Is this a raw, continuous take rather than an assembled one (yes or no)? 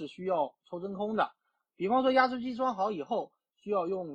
yes